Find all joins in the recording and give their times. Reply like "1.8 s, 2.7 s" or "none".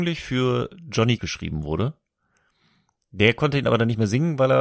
1.2 s